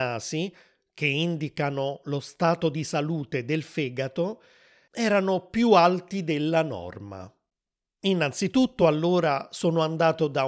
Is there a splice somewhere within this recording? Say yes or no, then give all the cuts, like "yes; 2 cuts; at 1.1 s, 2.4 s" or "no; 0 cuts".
no; 0 cuts